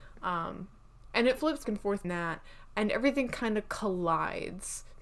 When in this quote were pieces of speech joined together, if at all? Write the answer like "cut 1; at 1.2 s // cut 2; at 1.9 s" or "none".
cut 1; at 1.6 s // cut 2; at 2.0 s